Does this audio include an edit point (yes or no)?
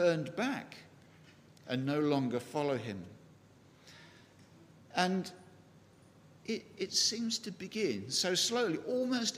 no